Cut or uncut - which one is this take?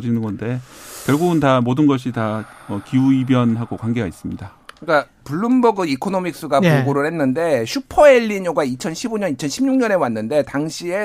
uncut